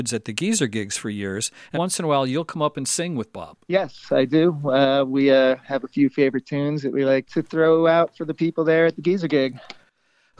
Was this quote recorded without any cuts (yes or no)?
no